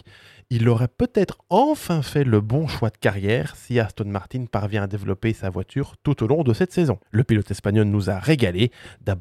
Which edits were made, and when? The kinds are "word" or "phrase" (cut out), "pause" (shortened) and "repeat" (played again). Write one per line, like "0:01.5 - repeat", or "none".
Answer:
0:07.0 - pause